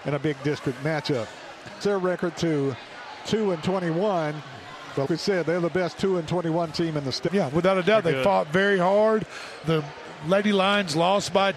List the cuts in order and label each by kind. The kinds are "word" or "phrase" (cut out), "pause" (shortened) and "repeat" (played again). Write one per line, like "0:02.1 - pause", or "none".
0:01.8 - phrase
0:05.1 - word
0:07.3 - word
0:09.6 - word